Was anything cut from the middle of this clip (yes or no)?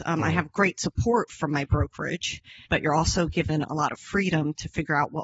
yes